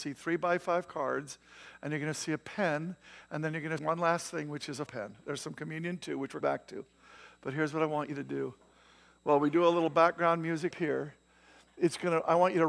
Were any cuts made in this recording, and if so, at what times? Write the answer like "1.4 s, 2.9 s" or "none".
3.8 s, 4.9 s, 6.4 s, 10.7 s

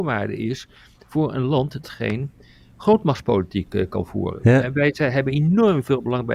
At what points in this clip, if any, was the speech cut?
1.8 s

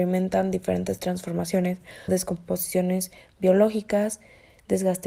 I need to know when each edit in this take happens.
2.1 s

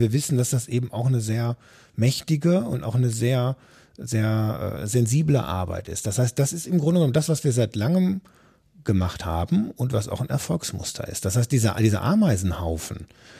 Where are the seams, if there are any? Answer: none

